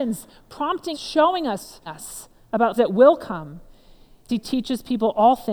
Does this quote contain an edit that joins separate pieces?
yes; 4 cuts; at 0.9 s, 1.9 s, 2.8 s, 4.3 s

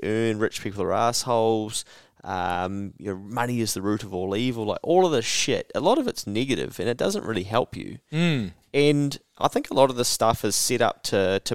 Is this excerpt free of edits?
yes; 0 cuts

